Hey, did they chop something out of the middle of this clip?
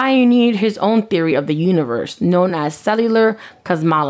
no; 0 cuts

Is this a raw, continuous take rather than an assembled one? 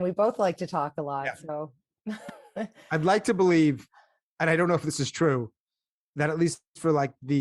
yes; 0 cuts

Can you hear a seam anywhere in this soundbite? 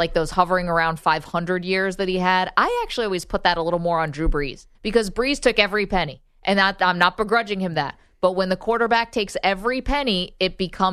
yes; 1 cut; at 4.7 s

